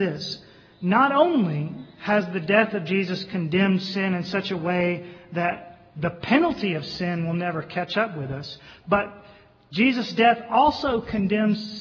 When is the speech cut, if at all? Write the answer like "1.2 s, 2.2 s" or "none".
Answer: none

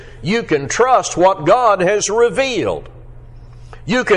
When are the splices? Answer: none

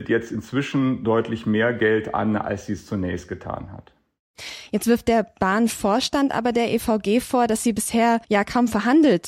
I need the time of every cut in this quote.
8.2 s

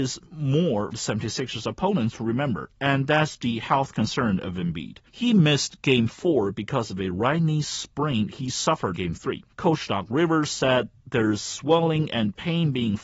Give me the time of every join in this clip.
0.9 s, 5.1 s, 9.0 s, 9.5 s, 11.0 s

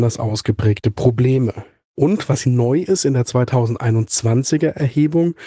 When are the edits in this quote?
2.4 s

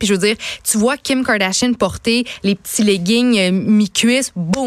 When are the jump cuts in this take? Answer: none

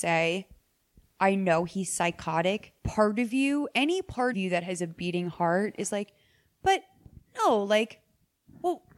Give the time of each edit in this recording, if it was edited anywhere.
2.8 s, 4.3 s, 7.3 s

